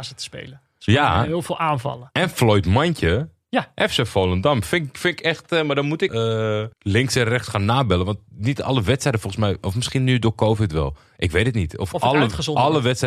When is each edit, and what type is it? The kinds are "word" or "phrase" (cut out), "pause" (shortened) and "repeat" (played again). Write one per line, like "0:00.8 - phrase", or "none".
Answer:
0:06.1 - word
0:06.7 - pause